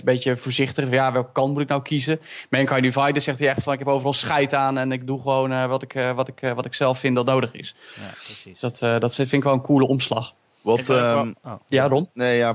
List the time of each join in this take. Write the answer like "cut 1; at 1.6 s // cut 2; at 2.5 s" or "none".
cut 1; at 11.4 s

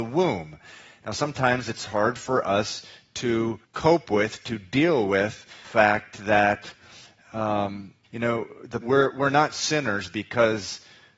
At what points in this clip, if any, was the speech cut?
cut 1; at 3.6 s // cut 2; at 5.6 s // cut 3; at 8.0 s // cut 4; at 8.8 s

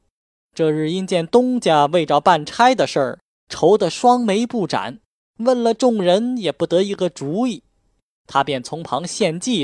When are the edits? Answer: none

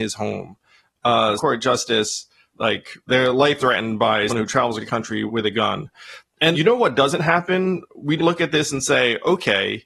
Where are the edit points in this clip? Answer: cut 1; at 1.4 s // cut 2; at 2.5 s // cut 3; at 3.1 s // cut 4; at 3.6 s // cut 5; at 4.3 s // cut 6; at 4.8 s // cut 7; at 5.3 s // cut 8; at 6.5 s // cut 9; at 8.2 s

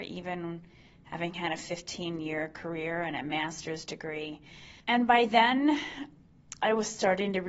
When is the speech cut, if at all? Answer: cut 1; at 4.8 s

